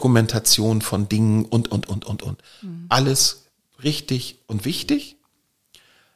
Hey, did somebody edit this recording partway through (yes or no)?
no